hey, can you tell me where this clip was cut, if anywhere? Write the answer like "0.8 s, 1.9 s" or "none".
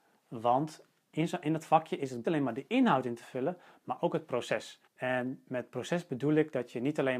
2.2 s, 4.9 s